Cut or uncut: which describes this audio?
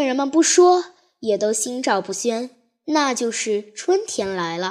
uncut